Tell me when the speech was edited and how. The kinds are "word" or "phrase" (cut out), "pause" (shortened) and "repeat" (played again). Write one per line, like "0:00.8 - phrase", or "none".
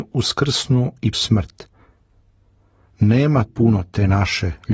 0:01.1 - word
0:03.5 - word